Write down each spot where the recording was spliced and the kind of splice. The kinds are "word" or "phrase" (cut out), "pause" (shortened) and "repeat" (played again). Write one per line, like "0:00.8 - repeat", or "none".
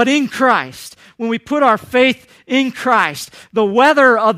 none

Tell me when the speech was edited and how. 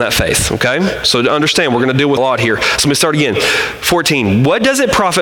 0:02.2 - phrase

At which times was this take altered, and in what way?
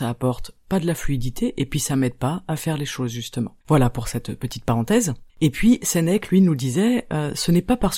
0:03.6 - pause
0:05.3 - pause

